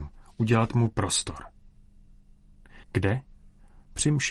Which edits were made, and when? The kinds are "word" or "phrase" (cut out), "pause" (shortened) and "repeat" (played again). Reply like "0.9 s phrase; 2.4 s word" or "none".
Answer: 2.8 s pause